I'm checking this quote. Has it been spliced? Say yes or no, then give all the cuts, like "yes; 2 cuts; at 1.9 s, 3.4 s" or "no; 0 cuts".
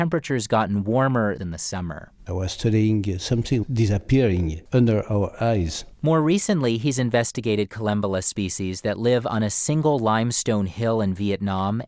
yes; 1 cut; at 1.4 s